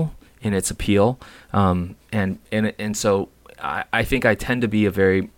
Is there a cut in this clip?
no; 0 cuts

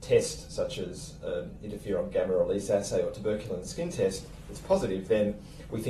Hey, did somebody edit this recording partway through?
no; 0 cuts

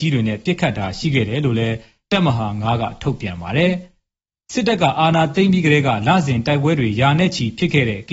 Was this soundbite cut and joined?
no; 0 cuts

